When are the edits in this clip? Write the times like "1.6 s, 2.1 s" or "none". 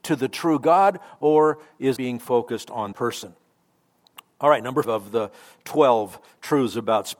2.0 s, 2.9 s, 4.8 s